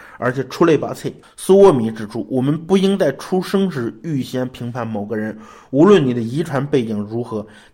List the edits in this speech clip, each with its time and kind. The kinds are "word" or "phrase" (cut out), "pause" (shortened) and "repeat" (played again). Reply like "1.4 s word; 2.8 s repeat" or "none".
1.2 s pause

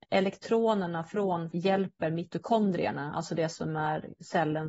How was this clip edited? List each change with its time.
1.5 s word

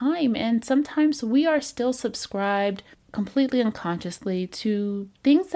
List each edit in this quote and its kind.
2.9 s pause

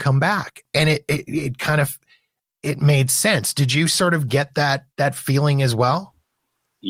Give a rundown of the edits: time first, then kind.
4.9 s pause

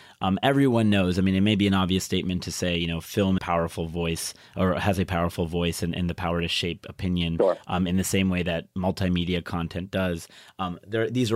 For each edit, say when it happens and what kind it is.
3.4 s phrase

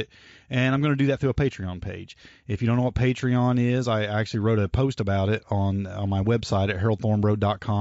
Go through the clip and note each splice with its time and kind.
none

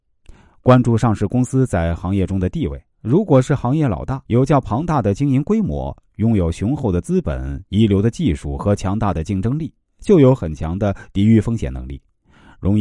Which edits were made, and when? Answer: 2.9 s pause; 4.3 s pause

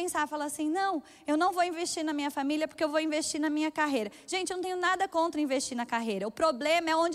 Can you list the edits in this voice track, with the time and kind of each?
none

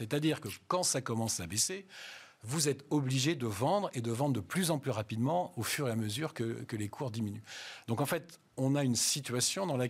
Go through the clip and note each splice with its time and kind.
none

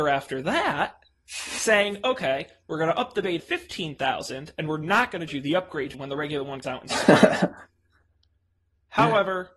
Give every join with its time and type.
3.4 s word; 5.3 s word; 5.9 s word; 6.6 s word

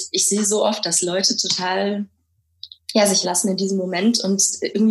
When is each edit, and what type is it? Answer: 2.8 s pause; 3.2 s word

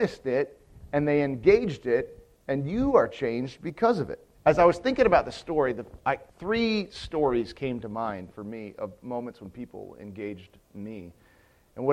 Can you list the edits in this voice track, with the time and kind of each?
4.3 s pause; 6.3 s pause

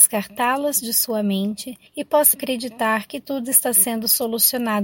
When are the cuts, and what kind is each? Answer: 1.9 s pause; 2.3 s word

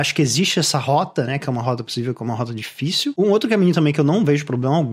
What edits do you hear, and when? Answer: none

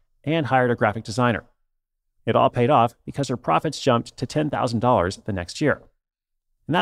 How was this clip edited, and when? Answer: none

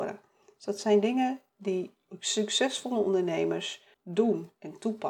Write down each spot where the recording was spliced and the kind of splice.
3.9 s pause

